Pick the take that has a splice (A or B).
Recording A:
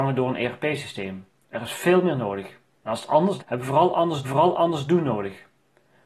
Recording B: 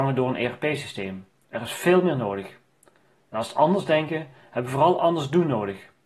A